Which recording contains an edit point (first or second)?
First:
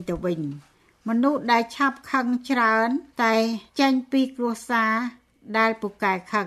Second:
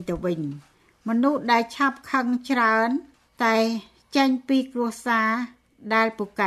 first